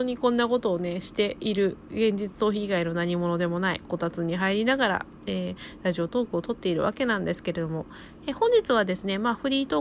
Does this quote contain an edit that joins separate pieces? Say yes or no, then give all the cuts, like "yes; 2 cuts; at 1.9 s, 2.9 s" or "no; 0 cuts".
no; 0 cuts